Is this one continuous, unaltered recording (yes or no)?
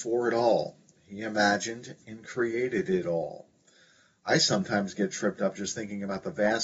yes